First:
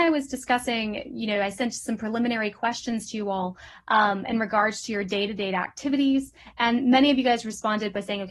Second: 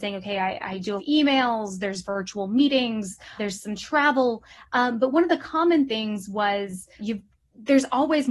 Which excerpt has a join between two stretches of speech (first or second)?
second